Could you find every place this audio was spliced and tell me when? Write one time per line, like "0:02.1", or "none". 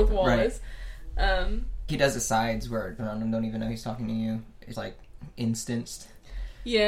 0:01.9
0:03.0
0:04.7